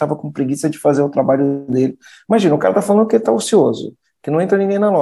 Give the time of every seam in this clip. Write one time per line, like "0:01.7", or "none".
none